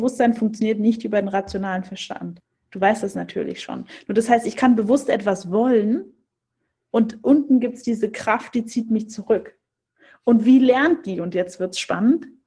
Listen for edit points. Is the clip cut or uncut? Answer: uncut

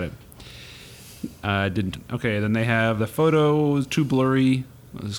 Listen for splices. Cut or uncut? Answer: cut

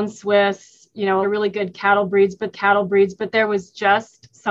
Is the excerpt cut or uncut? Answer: cut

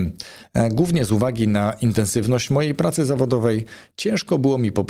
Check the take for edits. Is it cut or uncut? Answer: uncut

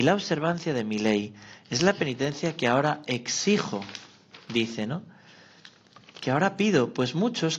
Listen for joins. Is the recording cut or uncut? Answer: uncut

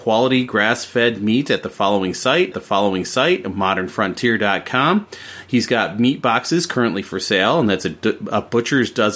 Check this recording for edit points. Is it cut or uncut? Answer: cut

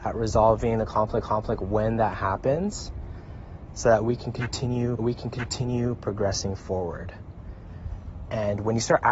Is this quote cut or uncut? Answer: cut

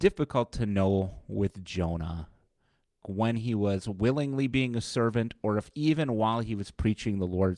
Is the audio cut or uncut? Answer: cut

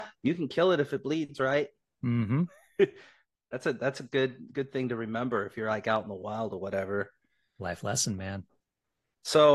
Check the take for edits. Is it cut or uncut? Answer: uncut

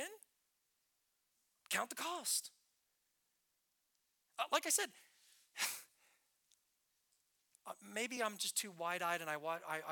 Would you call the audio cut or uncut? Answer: uncut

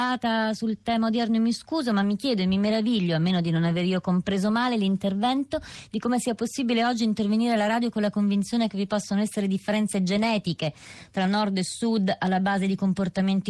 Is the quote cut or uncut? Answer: uncut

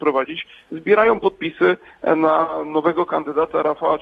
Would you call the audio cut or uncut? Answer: uncut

